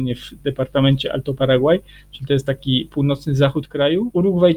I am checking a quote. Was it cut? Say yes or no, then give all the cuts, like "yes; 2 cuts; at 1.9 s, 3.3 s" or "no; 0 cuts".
no; 0 cuts